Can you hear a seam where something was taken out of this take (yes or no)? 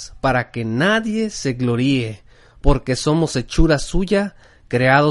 no